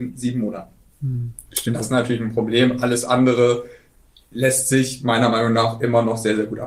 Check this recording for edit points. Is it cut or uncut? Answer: uncut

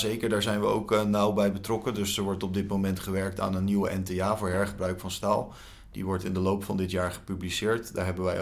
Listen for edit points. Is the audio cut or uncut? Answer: uncut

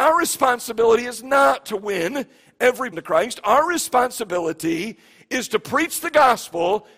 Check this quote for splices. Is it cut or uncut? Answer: cut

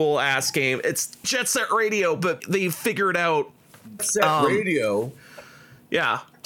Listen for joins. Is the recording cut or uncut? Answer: cut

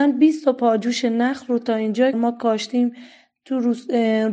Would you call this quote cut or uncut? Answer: cut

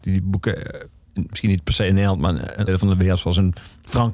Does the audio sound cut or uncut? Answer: cut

